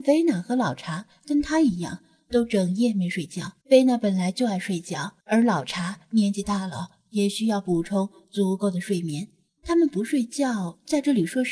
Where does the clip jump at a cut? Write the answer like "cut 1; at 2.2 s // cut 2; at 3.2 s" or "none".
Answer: cut 1; at 3.6 s // cut 2; at 5.2 s // cut 3; at 9.5 s

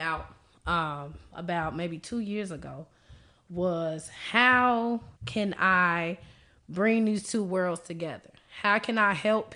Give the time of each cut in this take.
cut 1; at 5.2 s

